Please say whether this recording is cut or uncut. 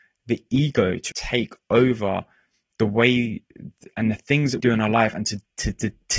cut